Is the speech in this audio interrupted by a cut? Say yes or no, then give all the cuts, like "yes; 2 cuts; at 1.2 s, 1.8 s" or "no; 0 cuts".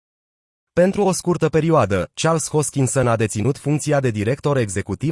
no; 0 cuts